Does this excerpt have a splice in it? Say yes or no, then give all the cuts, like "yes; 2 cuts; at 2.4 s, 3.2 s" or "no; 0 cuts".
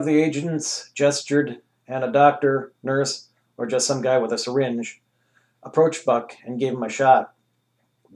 no; 0 cuts